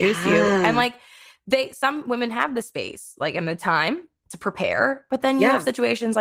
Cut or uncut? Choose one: uncut